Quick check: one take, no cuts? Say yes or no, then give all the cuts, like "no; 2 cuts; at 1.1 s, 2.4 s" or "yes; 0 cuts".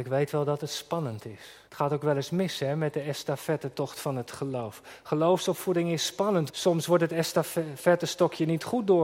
no; 2 cuts; at 1.7 s, 6.5 s